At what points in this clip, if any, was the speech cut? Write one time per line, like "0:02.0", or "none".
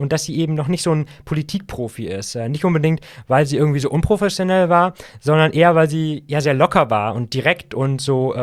none